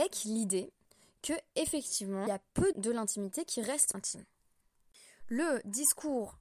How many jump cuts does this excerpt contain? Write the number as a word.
three